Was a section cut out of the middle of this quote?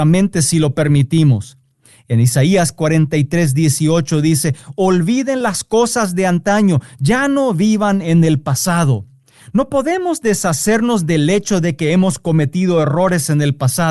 no; 0 cuts

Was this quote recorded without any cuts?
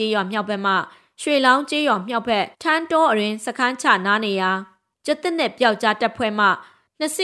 no; 1 cut; at 2.5 s

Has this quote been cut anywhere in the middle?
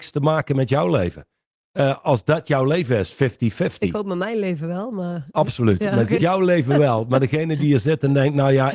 yes; 1 cut; at 6.2 s

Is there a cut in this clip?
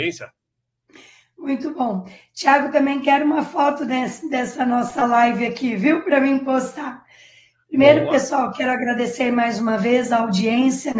no; 0 cuts

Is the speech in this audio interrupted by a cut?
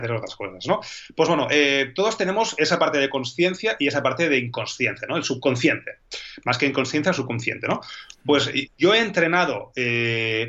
no; 0 cuts

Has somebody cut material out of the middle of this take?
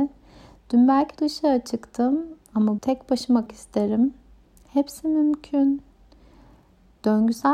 yes; 3 cuts; at 1.2 s, 2.8 s, 3.5 s

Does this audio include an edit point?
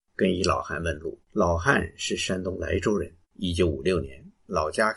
yes; 2 cuts; at 1.2 s, 3.2 s

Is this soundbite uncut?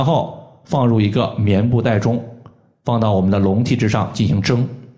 yes; 0 cuts

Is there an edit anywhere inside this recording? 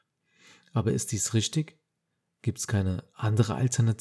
no; 0 cuts

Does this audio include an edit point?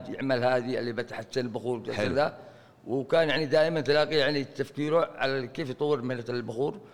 no; 0 cuts

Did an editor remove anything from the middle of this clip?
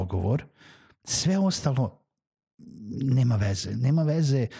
no; 0 cuts

